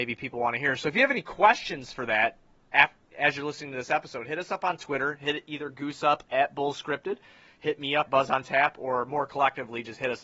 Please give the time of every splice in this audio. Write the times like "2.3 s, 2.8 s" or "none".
8.1 s